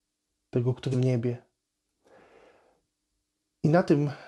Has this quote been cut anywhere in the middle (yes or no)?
yes